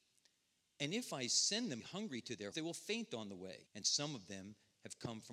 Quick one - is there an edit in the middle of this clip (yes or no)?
yes